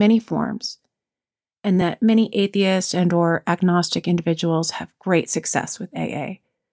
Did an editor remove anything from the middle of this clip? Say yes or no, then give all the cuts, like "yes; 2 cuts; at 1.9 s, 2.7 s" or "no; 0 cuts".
no; 0 cuts